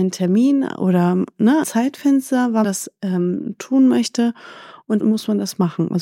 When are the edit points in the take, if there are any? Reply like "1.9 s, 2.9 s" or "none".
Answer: 1.6 s, 2.6 s, 5.0 s